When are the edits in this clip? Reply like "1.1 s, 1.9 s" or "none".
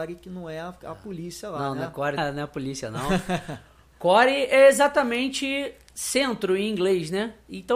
2.2 s, 5.9 s